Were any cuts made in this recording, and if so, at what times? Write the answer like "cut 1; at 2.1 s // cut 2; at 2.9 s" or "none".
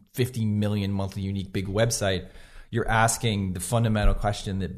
none

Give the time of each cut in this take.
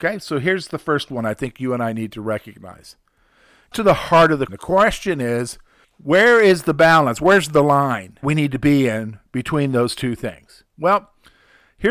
cut 1; at 3.7 s // cut 2; at 4.5 s // cut 3; at 5.8 s // cut 4; at 8.2 s // cut 5; at 10.7 s

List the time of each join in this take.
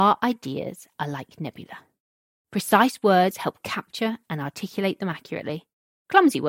none

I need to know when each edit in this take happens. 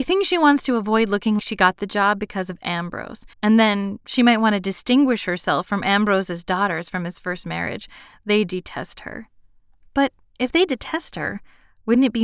cut 1; at 1.4 s // cut 2; at 3.3 s

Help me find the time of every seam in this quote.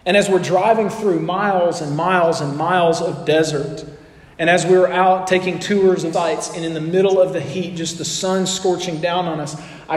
cut 1; at 6.1 s

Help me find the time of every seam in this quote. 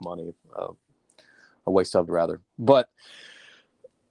cut 1; at 2.1 s

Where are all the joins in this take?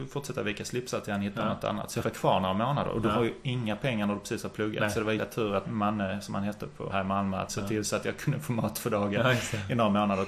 cut 1; at 2.0 s // cut 2; at 5.2 s // cut 3; at 5.6 s // cut 4; at 6.9 s // cut 5; at 7.5 s

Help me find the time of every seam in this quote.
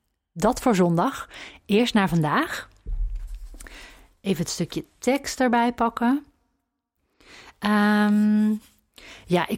none

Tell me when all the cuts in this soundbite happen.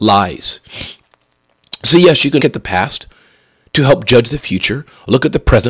cut 1; at 2.4 s

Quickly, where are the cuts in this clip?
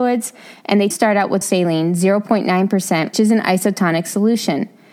cut 1; at 0.9 s // cut 2; at 1.4 s // cut 3; at 3.1 s

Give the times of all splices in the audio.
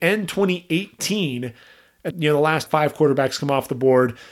cut 1; at 2.1 s // cut 2; at 2.7 s

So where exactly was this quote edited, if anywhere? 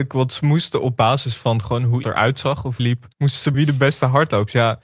cut 1; at 2.0 s // cut 2; at 2.8 s // cut 3; at 3.1 s // cut 4; at 3.5 s

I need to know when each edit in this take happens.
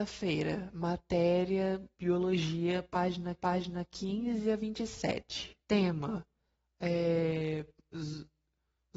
cut 1; at 1.9 s // cut 2; at 3.4 s // cut 3; at 5.6 s

